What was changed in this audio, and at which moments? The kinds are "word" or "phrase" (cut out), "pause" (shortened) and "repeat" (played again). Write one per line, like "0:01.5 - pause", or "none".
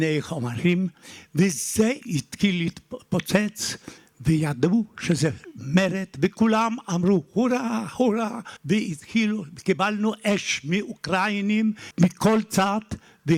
0:02.0 - pause
0:04.0 - pause
0:08.6 - pause
0:11.9 - pause